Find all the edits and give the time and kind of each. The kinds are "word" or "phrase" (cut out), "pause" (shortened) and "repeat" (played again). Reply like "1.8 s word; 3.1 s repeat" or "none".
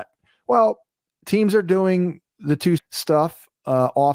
2.3 s pause; 2.8 s word